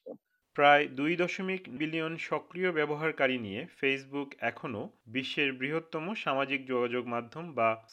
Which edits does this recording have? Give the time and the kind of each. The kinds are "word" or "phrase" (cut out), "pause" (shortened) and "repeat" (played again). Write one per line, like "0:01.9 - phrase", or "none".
0:01.8 - word